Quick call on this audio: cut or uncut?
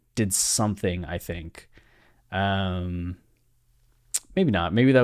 uncut